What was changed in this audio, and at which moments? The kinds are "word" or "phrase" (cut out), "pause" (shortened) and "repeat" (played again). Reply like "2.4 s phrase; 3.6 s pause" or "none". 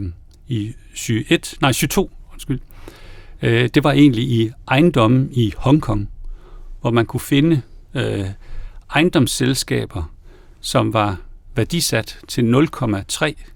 none